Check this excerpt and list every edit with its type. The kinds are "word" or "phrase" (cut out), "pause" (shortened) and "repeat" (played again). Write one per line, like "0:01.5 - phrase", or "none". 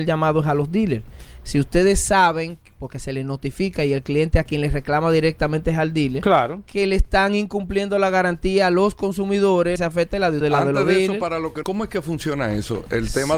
0:09.8 - phrase
0:10.4 - word
0:11.6 - phrase